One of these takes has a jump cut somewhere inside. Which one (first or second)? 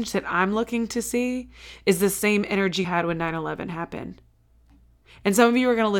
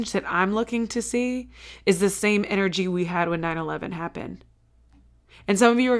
first